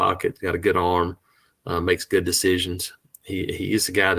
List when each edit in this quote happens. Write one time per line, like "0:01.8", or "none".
none

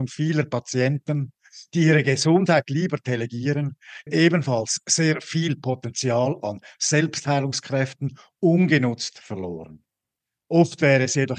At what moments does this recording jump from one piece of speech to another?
0:04.1

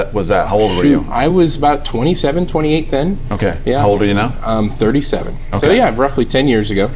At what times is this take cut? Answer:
none

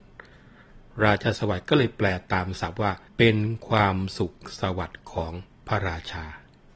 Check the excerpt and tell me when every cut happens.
0:03.1

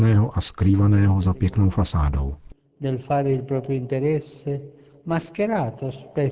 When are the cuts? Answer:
none

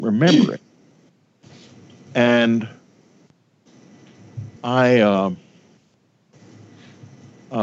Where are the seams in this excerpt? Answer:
0:04.6

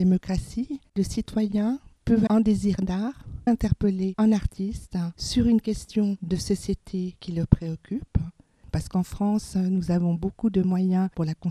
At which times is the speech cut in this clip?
0:02.3
0:03.5

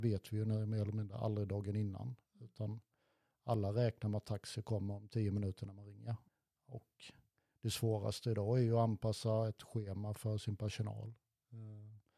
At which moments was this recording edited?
0:06.3

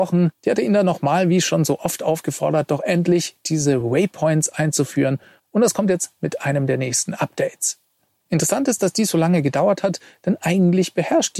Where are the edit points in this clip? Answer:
none

